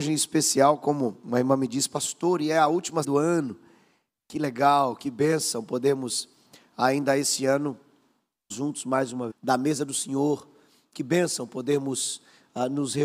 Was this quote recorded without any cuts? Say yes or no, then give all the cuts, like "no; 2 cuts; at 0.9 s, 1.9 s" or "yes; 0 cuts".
no; 3 cuts; at 3.0 s, 8.5 s, 9.3 s